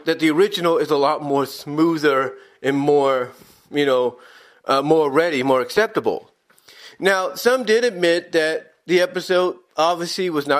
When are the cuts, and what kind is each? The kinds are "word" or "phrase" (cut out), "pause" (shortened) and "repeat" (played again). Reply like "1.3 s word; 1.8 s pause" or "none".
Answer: none